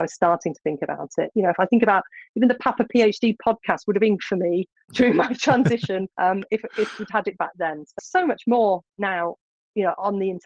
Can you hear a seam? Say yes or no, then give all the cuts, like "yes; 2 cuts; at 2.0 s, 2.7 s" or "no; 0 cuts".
yes; 3 cuts; at 4.2 s, 6.1 s, 8.0 s